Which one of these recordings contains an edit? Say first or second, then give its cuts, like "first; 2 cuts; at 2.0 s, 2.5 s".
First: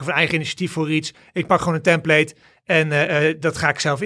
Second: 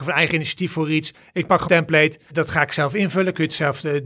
second; 2 cuts; at 1.7 s, 2.3 s